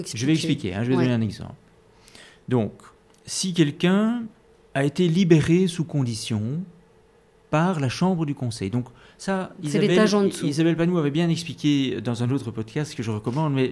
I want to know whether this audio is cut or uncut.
uncut